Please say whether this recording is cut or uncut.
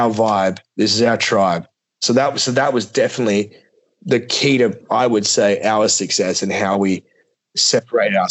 uncut